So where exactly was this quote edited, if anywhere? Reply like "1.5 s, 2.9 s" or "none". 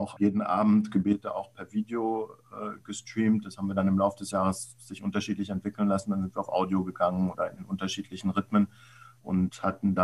none